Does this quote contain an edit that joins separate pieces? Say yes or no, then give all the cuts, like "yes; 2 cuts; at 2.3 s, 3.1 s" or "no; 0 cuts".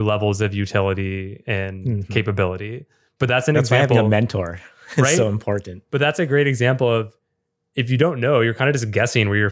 no; 0 cuts